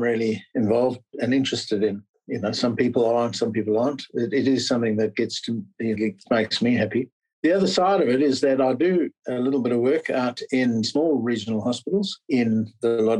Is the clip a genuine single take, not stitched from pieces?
no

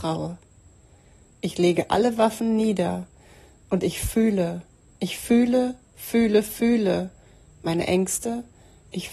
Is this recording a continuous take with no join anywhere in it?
yes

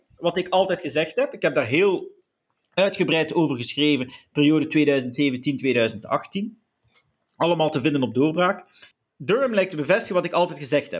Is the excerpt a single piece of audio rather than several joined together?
yes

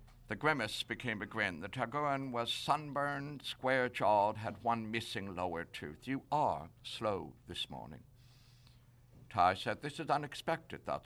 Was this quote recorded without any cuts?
yes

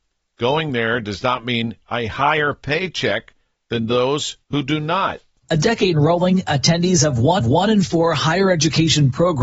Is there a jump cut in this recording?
yes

